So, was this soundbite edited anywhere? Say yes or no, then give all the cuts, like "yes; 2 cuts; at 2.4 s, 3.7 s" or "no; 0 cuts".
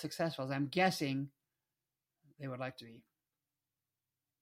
no; 0 cuts